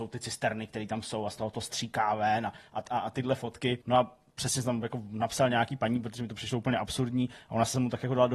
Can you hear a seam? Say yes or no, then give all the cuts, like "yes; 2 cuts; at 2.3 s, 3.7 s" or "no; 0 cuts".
yes; 1 cut; at 3.8 s